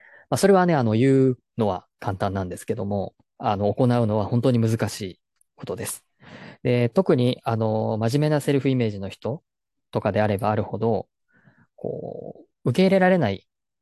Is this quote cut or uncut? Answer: uncut